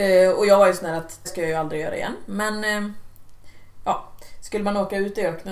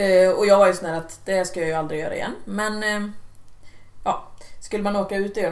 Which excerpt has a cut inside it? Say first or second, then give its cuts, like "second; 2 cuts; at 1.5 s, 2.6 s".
first; 1 cut; at 1.2 s